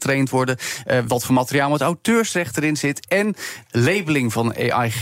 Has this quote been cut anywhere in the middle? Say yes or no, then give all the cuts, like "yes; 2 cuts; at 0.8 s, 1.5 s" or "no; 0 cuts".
no; 0 cuts